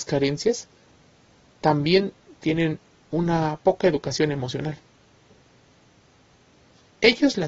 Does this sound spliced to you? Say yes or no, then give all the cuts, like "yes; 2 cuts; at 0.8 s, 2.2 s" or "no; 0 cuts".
no; 0 cuts